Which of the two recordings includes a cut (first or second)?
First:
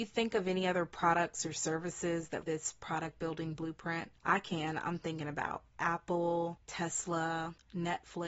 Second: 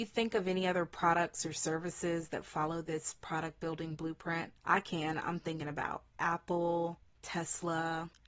first